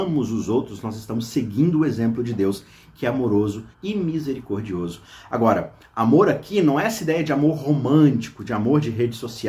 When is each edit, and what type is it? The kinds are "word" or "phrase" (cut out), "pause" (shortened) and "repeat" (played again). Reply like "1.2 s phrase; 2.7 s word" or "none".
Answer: 3.7 s pause